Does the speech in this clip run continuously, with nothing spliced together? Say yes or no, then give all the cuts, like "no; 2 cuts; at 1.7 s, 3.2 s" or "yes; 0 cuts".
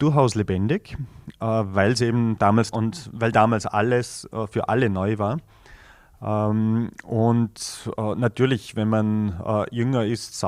no; 1 cut; at 2.7 s